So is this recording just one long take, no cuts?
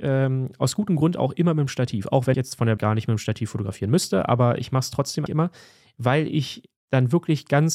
no; 3 cuts; at 2.3 s, 2.8 s, 5.3 s

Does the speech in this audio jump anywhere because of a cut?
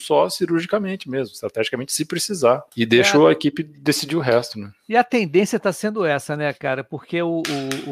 yes; 1 cut; at 2.7 s

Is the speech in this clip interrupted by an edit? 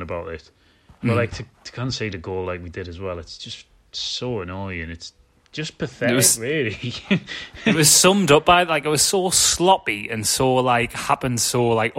no; 0 cuts

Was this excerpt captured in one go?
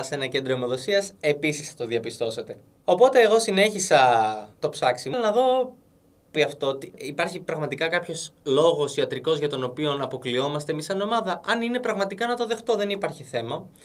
no; 3 cuts; at 4.6 s, 5.1 s, 6.4 s

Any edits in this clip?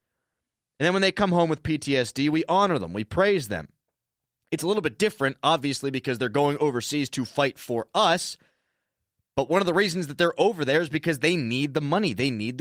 no; 0 cuts

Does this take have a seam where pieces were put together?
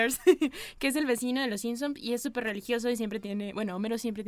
no; 0 cuts

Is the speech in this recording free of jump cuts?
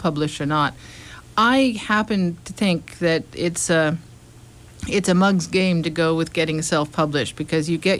yes; 0 cuts

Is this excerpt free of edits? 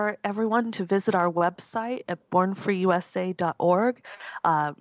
yes; 0 cuts

